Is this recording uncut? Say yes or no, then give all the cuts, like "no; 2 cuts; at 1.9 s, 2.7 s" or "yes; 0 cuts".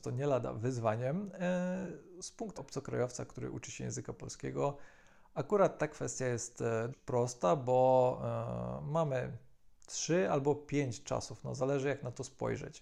no; 2 cuts; at 2.6 s, 6.9 s